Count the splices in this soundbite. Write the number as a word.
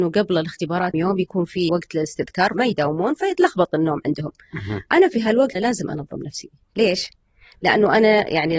four